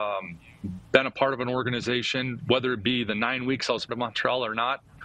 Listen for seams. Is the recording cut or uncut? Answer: cut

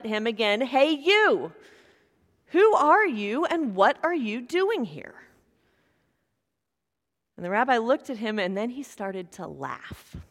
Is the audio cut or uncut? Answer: uncut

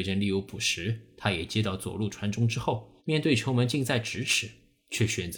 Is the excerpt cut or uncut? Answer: cut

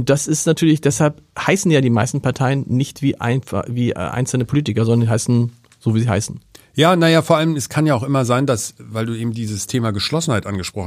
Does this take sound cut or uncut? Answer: uncut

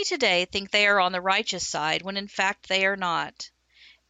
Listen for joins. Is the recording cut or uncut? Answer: uncut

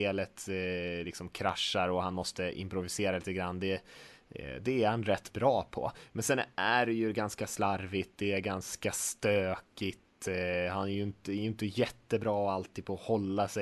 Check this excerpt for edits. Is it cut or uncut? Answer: uncut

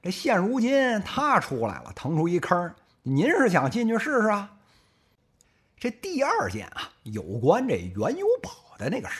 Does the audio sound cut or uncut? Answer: uncut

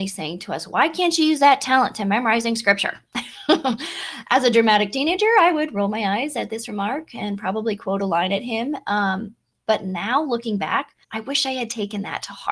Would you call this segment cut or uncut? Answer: cut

